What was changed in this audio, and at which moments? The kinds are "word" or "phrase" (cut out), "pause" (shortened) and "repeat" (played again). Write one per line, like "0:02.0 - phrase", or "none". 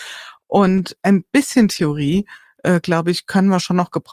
none